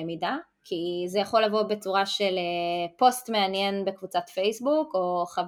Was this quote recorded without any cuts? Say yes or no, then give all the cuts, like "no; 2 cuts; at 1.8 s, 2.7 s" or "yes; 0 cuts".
yes; 0 cuts